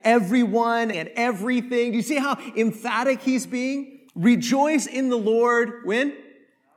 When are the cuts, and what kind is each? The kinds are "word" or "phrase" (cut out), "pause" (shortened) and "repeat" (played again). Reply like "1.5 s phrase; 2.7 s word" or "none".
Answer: 0.9 s phrase; 4.1 s pause